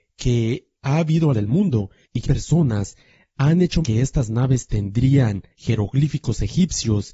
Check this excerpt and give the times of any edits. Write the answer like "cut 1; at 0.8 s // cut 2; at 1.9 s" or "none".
cut 1; at 1.3 s // cut 2; at 2.2 s // cut 3; at 3.8 s // cut 4; at 5.5 s